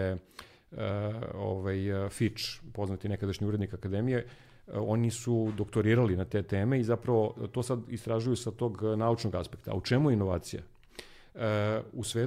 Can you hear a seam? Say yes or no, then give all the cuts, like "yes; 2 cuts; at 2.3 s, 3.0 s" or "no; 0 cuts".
no; 0 cuts